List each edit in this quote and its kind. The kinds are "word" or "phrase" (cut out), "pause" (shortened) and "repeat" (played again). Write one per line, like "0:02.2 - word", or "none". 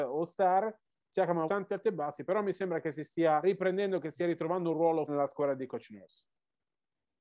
0:01.5 - word
0:03.4 - word
0:05.1 - word